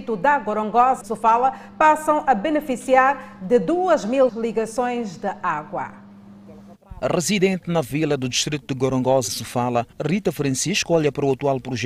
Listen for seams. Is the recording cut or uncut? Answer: cut